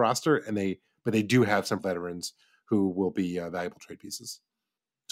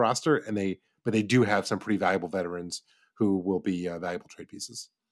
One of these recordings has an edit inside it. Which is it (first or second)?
first